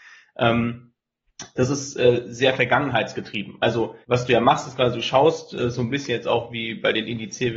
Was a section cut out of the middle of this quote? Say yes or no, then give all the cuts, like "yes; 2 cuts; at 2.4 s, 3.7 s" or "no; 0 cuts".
yes; 1 cut; at 4.0 s